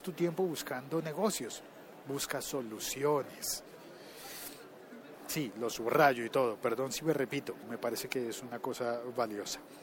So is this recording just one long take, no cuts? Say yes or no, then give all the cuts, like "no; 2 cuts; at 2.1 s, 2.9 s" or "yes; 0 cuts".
no; 1 cut; at 7.6 s